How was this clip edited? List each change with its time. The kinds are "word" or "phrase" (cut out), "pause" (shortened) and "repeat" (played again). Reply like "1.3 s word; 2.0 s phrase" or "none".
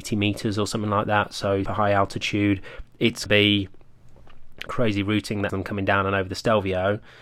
1.6 s word; 3.3 s phrase; 4.7 s phrase; 5.5 s word